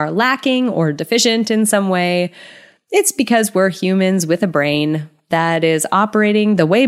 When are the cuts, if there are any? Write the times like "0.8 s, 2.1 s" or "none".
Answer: none